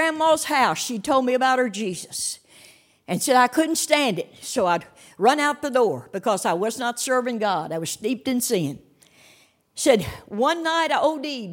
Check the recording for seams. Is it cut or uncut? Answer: uncut